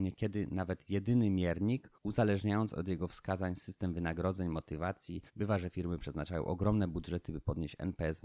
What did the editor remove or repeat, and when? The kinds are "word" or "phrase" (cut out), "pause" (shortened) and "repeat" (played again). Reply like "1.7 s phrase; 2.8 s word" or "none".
1.9 s pause; 5.3 s pause